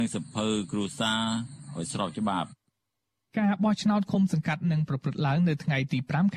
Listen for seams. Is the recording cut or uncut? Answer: uncut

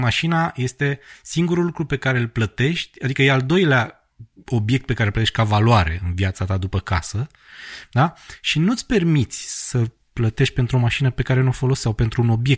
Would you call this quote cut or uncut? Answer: uncut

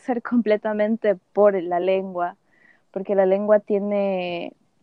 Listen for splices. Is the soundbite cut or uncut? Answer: uncut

